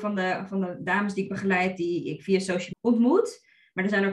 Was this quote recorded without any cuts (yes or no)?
no